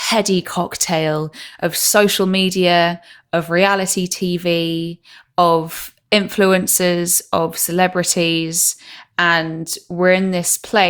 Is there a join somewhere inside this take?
no; 0 cuts

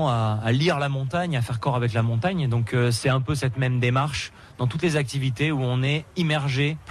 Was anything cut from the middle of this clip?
no; 0 cuts

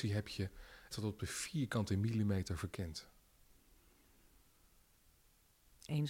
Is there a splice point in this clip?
yes; 1 cut; at 0.9 s

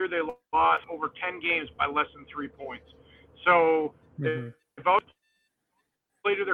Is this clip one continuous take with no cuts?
yes; 0 cuts

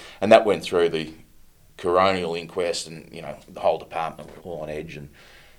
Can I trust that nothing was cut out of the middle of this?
no; 1 cut; at 4.4 s

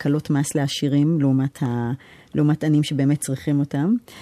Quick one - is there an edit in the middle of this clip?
no; 0 cuts

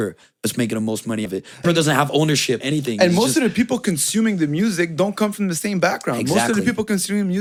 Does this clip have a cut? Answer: yes; 3 cuts; at 1.3 s, 1.6 s, 2.6 s

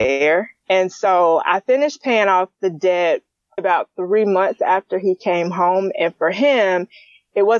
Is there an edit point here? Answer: yes; 1 cut; at 3.6 s

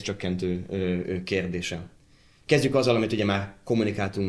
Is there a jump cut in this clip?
no; 0 cuts

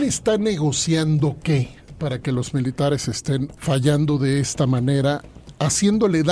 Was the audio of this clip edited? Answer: yes; 1 cut; at 3.6 s

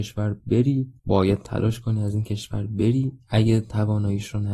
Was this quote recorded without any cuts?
no; 1 cut; at 1.0 s

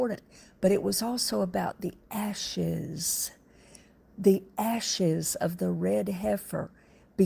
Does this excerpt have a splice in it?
no; 0 cuts

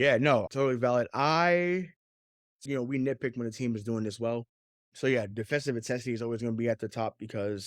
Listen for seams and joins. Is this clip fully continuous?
no; 1 cut; at 2.7 s

